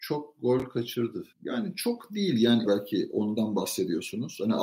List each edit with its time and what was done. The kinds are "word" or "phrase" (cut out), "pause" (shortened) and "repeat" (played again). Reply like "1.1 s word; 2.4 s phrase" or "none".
1.3 s pause; 2.7 s phrase